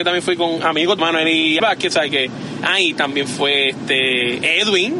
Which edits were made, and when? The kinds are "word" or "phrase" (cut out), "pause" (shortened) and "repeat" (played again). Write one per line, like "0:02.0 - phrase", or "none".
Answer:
0:01.0 - phrase
0:01.6 - word